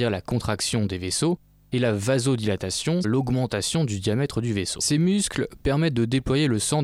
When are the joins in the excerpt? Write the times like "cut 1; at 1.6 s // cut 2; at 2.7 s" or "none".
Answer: cut 1; at 3.0 s